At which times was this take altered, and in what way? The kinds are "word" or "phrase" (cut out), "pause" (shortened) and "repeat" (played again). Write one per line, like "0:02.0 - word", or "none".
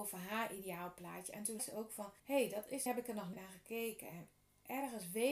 0:01.6 - word
0:02.2 - pause
0:02.9 - phrase
0:03.3 - word